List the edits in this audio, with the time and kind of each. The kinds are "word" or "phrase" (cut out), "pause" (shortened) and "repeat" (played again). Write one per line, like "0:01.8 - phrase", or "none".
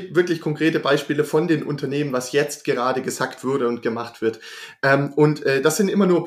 none